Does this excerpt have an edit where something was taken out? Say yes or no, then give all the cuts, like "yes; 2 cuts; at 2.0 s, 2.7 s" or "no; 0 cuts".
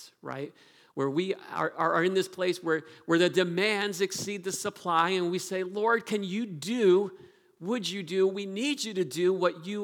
no; 0 cuts